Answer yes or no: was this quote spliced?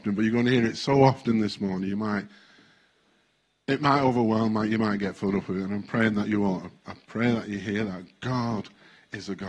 no